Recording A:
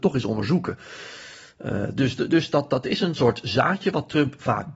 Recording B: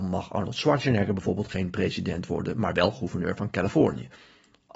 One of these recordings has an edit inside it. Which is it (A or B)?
A